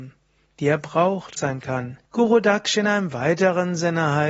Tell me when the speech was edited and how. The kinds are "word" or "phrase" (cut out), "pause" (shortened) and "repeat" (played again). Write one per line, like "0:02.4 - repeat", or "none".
0:01.4 - phrase
0:02.0 - pause